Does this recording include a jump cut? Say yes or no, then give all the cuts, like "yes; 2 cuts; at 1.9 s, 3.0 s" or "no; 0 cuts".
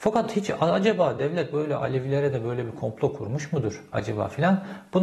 no; 0 cuts